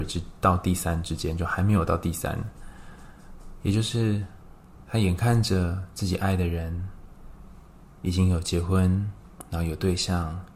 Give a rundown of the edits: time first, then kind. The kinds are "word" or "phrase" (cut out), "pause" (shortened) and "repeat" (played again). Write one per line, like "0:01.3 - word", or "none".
none